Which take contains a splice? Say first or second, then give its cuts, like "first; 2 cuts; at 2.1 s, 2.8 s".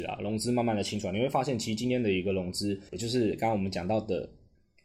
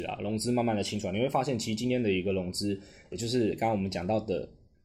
first; 1 cut; at 2.9 s